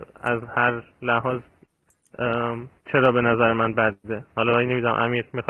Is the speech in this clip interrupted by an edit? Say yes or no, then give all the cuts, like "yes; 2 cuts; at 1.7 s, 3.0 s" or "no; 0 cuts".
no; 0 cuts